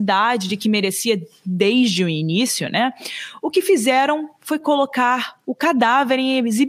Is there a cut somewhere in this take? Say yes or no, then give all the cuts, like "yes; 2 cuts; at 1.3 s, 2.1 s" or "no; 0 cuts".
no; 0 cuts